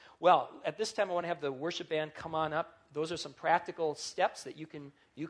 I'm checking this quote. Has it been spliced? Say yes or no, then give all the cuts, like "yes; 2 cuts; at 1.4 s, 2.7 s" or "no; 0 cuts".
no; 0 cuts